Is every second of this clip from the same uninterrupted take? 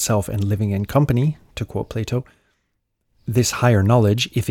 yes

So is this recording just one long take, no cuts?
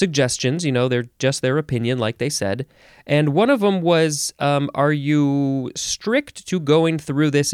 yes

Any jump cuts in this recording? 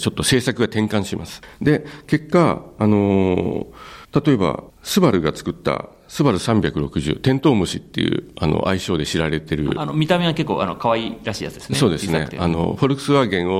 yes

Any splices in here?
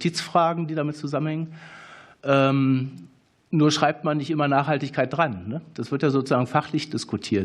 no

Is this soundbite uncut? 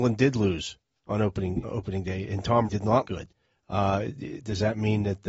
no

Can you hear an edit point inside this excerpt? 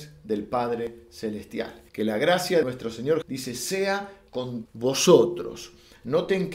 yes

